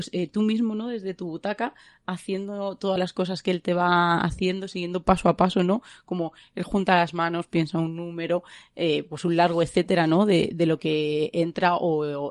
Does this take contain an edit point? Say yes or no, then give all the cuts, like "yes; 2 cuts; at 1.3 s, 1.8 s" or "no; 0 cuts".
no; 0 cuts